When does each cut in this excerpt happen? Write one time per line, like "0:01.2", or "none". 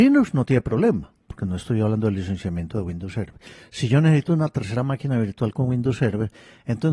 none